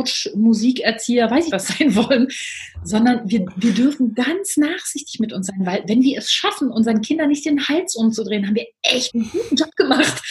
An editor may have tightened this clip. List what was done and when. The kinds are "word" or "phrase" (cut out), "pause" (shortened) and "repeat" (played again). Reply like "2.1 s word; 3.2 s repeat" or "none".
1.5 s word; 9.1 s word

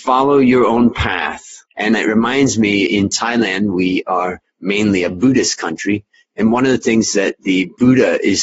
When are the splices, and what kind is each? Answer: none

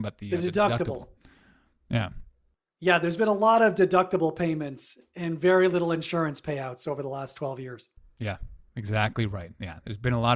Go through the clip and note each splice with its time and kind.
none

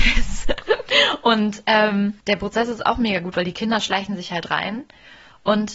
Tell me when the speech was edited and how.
2.2 s pause

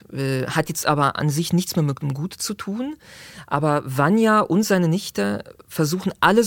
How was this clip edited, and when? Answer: none

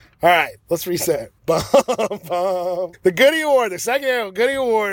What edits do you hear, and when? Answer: 1.4 s pause; 2.9 s word

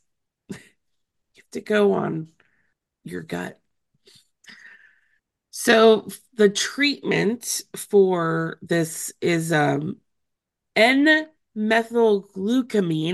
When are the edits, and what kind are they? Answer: none

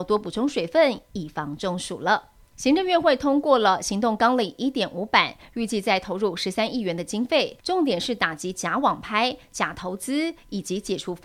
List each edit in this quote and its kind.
7.6 s pause

